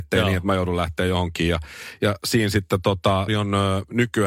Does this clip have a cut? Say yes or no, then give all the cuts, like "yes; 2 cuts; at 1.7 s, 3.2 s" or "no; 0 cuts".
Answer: yes; 1 cut; at 3.3 s